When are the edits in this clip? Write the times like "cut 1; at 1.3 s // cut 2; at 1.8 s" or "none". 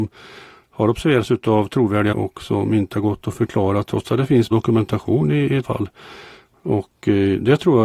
cut 1; at 2.1 s // cut 2; at 4.5 s // cut 3; at 5.6 s